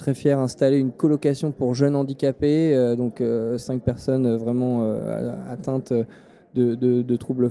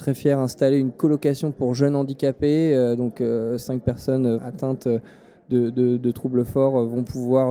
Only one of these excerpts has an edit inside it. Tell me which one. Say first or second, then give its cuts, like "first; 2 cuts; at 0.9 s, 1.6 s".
second; 1 cut; at 4.4 s